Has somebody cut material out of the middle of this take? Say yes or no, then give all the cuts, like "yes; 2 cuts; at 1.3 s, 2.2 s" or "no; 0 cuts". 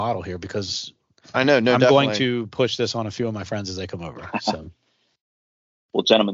no; 0 cuts